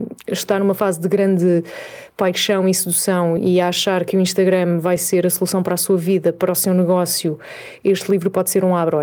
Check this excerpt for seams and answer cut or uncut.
uncut